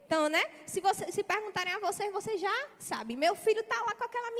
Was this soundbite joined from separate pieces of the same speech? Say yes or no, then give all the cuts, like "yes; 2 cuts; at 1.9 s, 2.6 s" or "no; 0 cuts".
yes; 1 cut; at 2.7 s